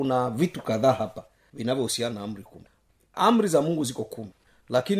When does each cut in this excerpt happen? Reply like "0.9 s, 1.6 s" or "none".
none